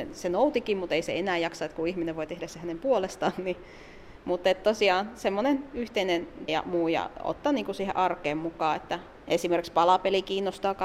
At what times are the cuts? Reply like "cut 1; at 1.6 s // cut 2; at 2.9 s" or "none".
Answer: cut 1; at 6.5 s

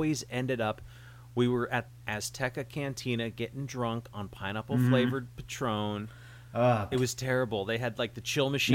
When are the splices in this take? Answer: cut 1; at 1.9 s // cut 2; at 6.9 s

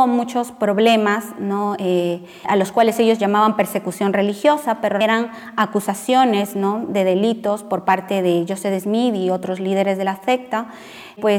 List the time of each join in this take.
cut 1; at 2.4 s // cut 2; at 5.0 s

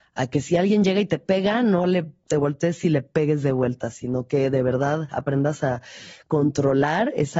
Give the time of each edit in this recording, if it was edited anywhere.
none

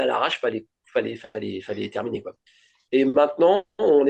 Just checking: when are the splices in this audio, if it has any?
none

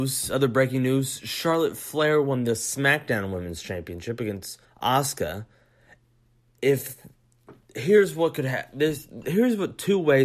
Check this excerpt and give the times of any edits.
cut 1; at 4.6 s // cut 2; at 7.6 s

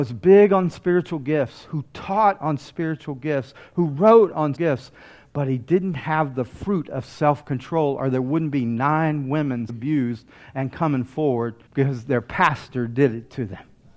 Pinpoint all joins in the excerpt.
cut 1; at 4.5 s // cut 2; at 9.7 s // cut 3; at 11.7 s

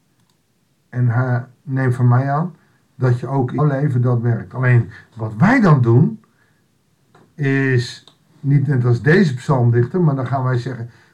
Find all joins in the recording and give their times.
cut 1; at 3.6 s

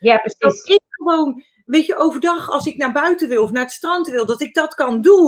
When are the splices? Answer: none

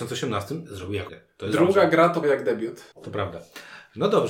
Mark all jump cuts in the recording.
cut 1; at 1.1 s // cut 2; at 2.2 s // cut 3; at 2.9 s

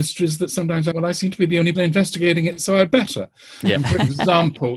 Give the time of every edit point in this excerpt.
cut 1; at 0.9 s // cut 2; at 1.7 s

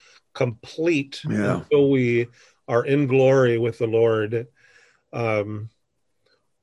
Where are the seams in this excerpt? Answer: none

